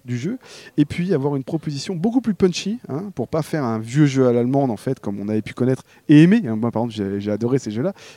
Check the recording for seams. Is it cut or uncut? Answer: uncut